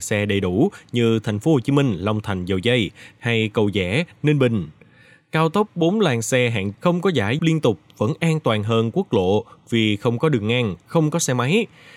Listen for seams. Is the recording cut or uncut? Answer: cut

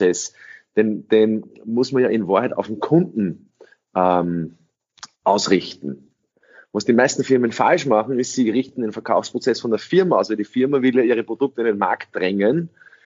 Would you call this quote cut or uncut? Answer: cut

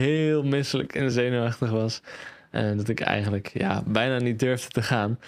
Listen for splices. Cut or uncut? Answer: uncut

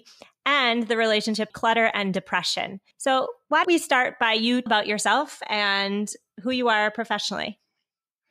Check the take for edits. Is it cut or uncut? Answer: cut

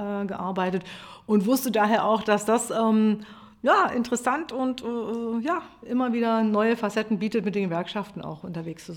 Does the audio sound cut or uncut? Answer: uncut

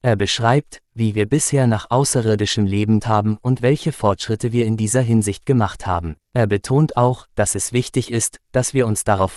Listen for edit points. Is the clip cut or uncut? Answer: cut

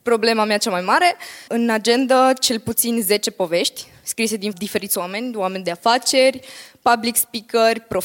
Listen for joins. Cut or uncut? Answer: cut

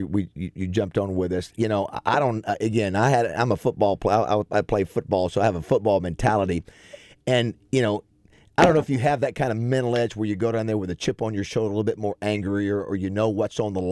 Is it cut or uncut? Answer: uncut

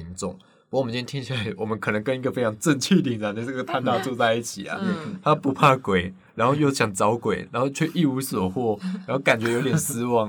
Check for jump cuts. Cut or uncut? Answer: uncut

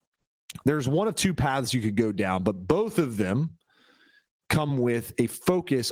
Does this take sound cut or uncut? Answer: uncut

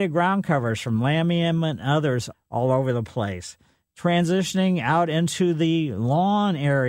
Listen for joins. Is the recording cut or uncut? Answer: cut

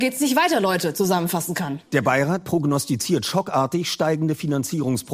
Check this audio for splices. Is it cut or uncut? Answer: cut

